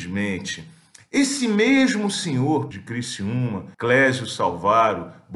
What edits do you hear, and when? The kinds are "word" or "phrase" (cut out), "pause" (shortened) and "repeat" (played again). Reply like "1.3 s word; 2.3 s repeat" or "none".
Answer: 2.7 s word; 3.7 s pause